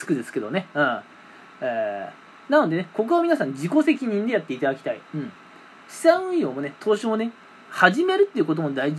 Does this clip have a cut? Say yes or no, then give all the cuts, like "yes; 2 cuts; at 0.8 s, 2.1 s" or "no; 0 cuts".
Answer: no; 0 cuts